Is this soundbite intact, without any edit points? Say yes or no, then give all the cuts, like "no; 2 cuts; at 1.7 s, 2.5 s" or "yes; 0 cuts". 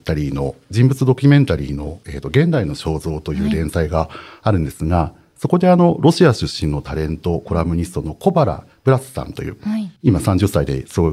no; 1 cut; at 10.0 s